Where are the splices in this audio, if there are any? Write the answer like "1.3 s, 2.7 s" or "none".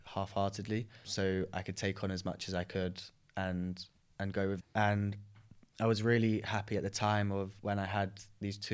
1.0 s, 4.6 s